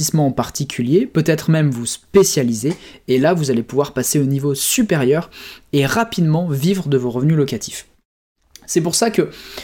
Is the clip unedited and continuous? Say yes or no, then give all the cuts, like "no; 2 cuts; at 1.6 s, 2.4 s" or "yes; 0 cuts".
yes; 0 cuts